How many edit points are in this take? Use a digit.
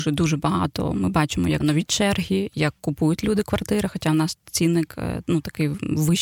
1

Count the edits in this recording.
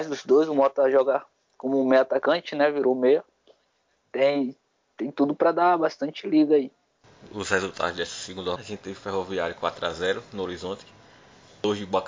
2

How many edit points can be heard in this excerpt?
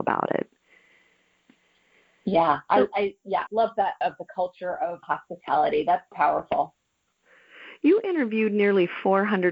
4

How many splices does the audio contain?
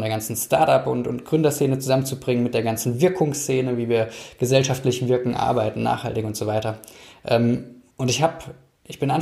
1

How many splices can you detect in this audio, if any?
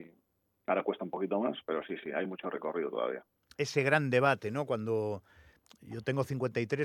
1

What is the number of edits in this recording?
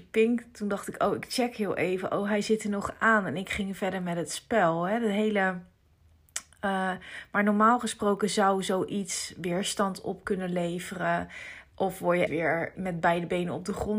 2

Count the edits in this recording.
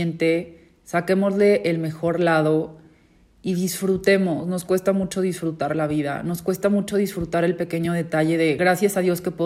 0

